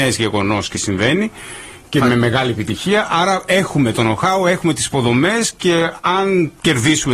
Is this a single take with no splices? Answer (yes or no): yes